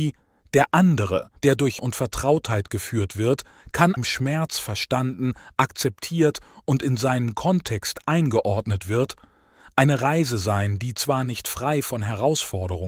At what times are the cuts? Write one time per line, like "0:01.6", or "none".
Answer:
0:01.4
0:01.8
0:04.0